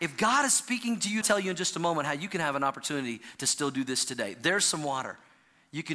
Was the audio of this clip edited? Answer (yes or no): yes